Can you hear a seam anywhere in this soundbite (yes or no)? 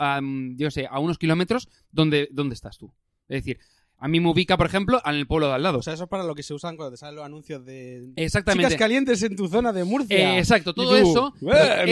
no